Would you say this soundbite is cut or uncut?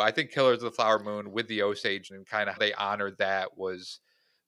cut